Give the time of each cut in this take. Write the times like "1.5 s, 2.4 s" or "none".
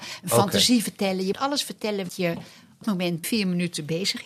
1.3 s, 2.1 s, 2.8 s, 3.2 s

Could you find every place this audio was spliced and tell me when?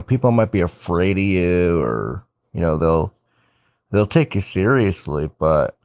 none

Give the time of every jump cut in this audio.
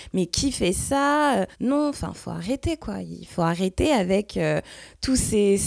1.5 s

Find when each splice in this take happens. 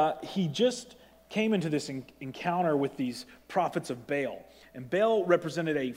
none

